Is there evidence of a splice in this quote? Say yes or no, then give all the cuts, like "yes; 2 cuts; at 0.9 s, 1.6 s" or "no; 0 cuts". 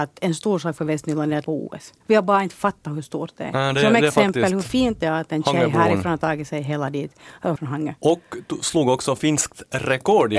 yes; 3 cuts; at 1.4 s, 2.0 s, 7.6 s